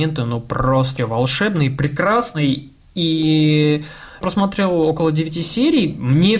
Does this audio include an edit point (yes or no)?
yes